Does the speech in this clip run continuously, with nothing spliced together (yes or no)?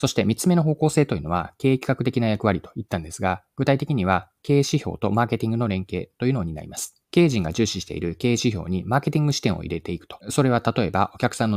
no